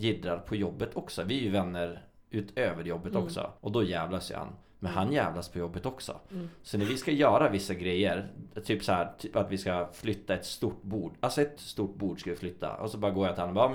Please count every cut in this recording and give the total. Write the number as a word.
three